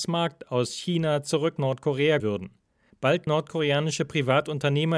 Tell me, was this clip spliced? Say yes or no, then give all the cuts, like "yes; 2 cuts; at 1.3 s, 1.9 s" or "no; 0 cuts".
yes; 3 cuts; at 1.6 s, 2.2 s, 3.3 s